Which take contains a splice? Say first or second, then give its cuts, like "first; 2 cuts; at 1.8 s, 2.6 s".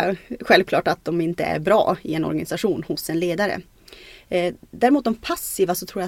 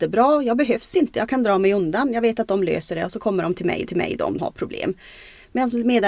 second; 2 cuts; at 3.9 s, 4.4 s